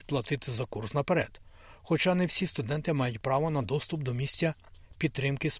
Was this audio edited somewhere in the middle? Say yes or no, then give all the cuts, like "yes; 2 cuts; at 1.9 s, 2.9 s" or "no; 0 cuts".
no; 0 cuts